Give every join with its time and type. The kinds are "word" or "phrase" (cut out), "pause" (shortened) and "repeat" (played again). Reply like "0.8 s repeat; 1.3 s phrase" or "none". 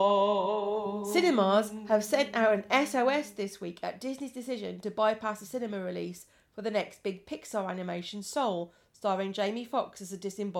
none